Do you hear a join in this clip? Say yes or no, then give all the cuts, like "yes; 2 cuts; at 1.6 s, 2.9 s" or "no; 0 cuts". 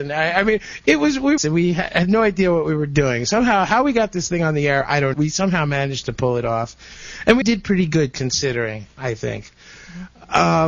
yes; 3 cuts; at 1.4 s, 5.1 s, 7.4 s